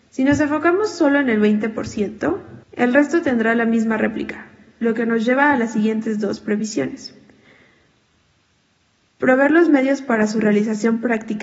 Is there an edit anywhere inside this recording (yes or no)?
yes